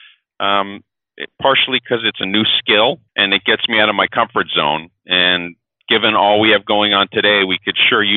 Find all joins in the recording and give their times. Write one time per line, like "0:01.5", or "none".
0:03.1
0:05.0